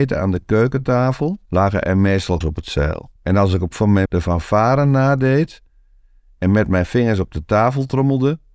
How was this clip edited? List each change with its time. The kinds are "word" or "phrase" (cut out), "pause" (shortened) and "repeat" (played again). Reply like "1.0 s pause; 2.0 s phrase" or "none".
1.4 s pause; 2.4 s word; 3.2 s pause; 3.7 s word; 4.1 s word